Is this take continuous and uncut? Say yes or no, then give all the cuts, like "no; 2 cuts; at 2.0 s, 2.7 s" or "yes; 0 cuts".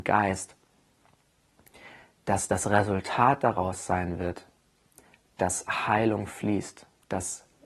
yes; 0 cuts